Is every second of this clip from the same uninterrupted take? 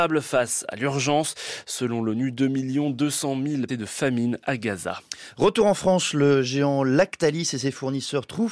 no; 1 cut; at 3.7 s

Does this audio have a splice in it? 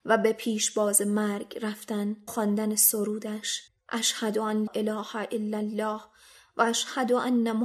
yes; 3 cuts; at 2.3 s, 3.7 s, 4.7 s

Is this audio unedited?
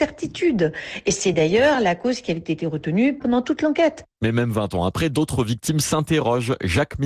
yes; 0 cuts

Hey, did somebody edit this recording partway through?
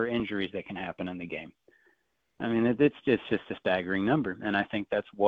no; 0 cuts

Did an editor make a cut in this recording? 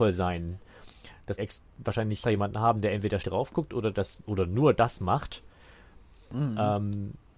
yes; 3 cuts; at 1.4 s, 2.2 s, 3.2 s

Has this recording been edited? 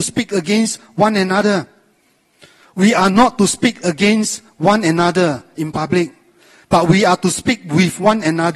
no; 0 cuts

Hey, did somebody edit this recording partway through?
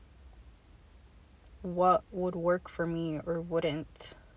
no; 0 cuts

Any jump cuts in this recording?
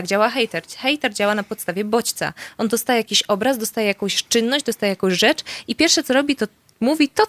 no; 0 cuts

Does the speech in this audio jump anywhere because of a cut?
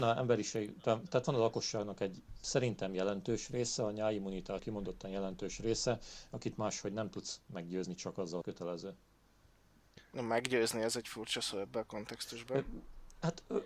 yes; 2 cuts; at 4.6 s, 8.4 s

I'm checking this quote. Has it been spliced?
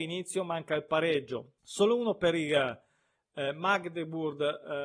yes; 1 cut; at 1.6 s

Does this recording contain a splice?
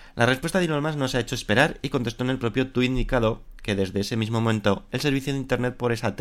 no; 0 cuts

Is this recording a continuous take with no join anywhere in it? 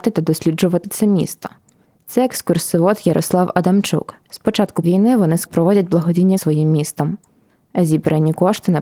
no; 5 cuts; at 1.8 s, 4.2 s, 4.8 s, 5.5 s, 6.4 s

